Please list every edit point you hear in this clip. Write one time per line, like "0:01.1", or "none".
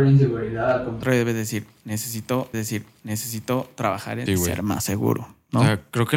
0:02.5
0:04.3

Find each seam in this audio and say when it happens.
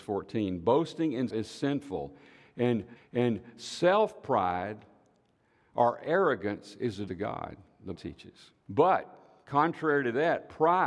0:01.3
0:03.0
0:07.1
0:07.9
0:08.6

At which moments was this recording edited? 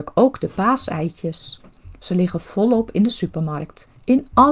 none

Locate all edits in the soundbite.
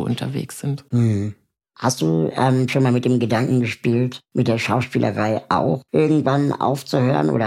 none

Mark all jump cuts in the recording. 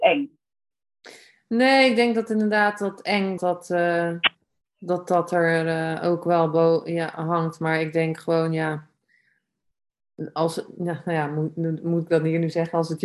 0:03.4

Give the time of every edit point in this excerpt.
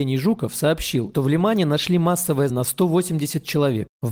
0:01.1
0:02.5

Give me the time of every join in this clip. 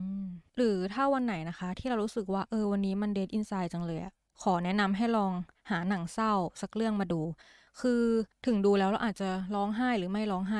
none

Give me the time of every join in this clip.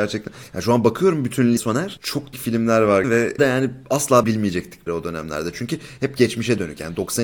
0:01.6
0:02.3
0:03.0
0:03.4
0:04.2
0:04.9

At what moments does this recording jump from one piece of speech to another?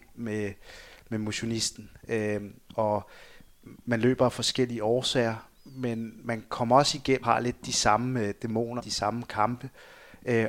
0:03.8
0:05.6
0:07.2
0:08.8

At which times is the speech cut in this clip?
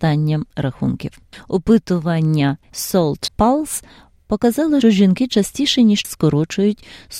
0:02.7
0:03.3
0:04.8
0:06.0

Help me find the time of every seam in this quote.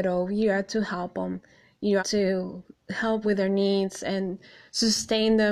0:02.0
0:03.2

